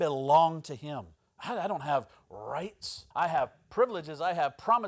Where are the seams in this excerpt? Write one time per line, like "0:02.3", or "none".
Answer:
0:01.2
0:03.1